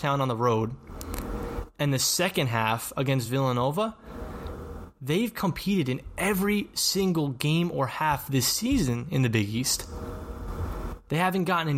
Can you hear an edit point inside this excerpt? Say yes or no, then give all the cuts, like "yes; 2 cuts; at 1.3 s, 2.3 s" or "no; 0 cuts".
no; 0 cuts